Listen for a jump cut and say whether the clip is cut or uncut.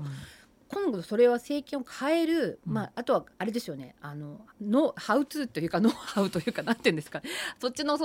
cut